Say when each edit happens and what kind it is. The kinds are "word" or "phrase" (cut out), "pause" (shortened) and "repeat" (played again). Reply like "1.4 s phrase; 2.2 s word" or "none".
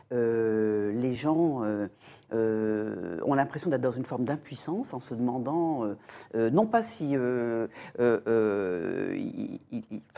none